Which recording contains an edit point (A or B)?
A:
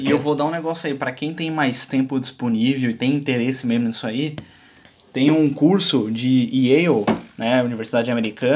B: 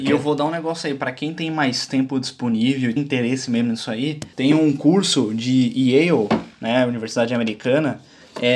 B